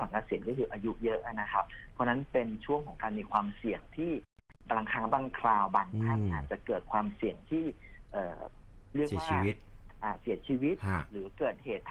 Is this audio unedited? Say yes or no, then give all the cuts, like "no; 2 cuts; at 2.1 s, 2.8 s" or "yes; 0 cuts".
yes; 0 cuts